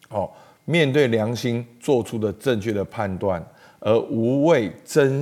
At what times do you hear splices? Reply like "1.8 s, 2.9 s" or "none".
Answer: none